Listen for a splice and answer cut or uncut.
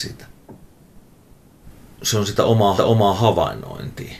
cut